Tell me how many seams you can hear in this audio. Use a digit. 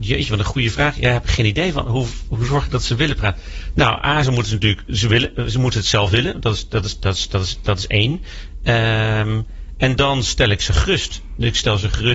0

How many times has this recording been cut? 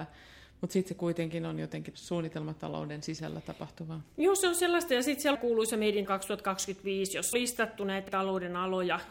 5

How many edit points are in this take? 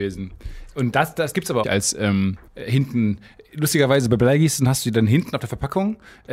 4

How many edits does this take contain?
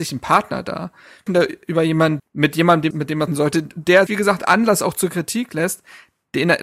5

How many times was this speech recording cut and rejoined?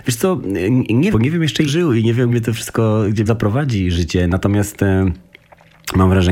4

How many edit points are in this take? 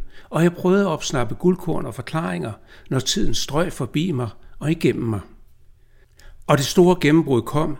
0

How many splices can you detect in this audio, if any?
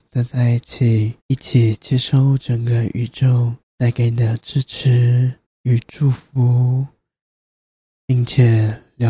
3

